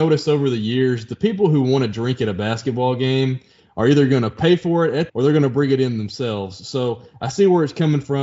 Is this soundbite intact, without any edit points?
no; 1 cut; at 5.1 s

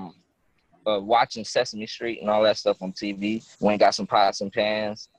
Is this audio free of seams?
no; 1 cut; at 3.5 s

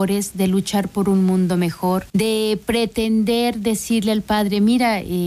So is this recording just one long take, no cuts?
no; 1 cut; at 2.1 s

